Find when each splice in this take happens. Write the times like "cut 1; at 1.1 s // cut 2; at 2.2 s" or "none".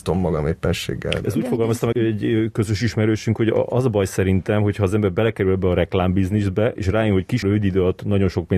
cut 1; at 1.9 s // cut 2; at 7.4 s